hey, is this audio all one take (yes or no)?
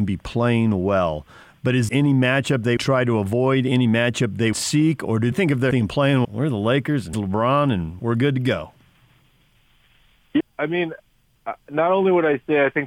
no